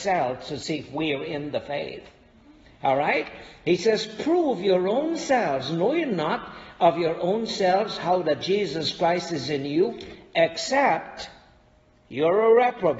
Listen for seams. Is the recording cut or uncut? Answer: uncut